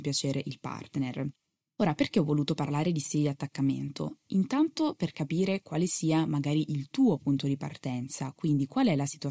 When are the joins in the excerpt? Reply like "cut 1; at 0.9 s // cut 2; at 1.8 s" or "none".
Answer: none